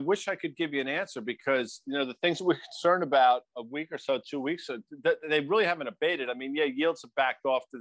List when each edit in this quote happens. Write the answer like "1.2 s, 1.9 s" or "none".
none

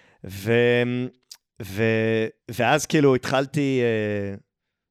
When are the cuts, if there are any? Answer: 2.4 s

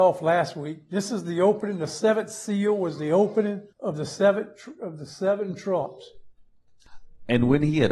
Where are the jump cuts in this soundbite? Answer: 3.7 s

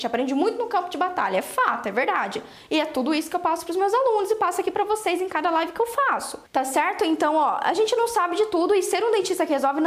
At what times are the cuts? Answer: none

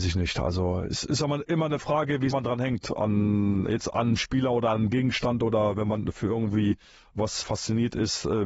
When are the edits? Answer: 2.3 s, 7.4 s

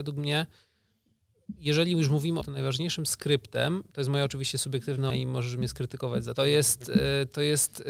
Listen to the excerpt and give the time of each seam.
2.4 s, 5.1 s, 6.3 s

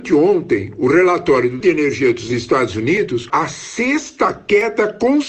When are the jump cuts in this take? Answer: 1.6 s, 3.3 s

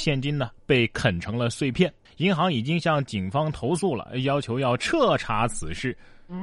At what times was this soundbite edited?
2.1 s

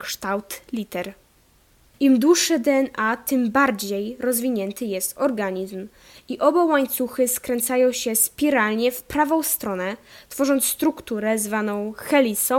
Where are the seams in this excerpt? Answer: none

